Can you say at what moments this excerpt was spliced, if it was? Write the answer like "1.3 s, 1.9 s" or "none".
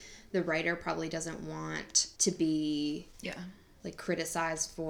2.1 s, 3.1 s